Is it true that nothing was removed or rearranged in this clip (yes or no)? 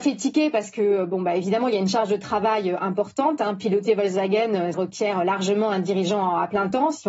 no